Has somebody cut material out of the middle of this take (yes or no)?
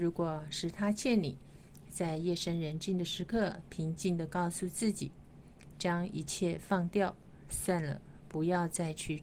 no